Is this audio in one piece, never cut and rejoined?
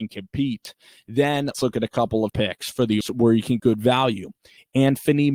no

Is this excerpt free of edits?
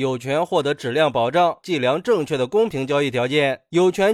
no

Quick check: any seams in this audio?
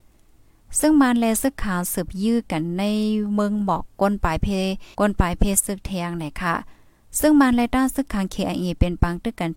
yes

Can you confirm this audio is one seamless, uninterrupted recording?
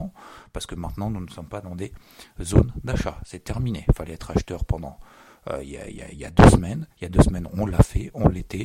no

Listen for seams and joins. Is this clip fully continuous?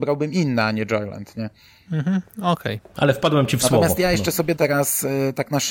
no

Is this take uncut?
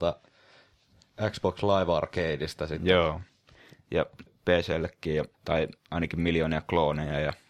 no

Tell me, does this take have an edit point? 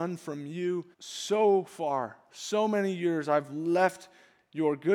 yes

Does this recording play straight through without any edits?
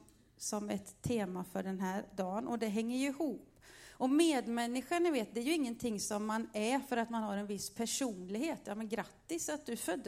yes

